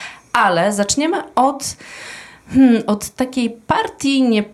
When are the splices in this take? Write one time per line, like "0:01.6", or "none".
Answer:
none